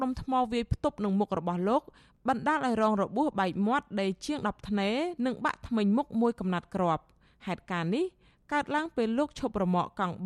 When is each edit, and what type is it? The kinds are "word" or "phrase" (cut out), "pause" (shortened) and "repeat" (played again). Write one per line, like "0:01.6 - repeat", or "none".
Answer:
none